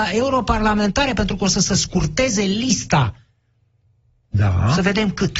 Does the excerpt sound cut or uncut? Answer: uncut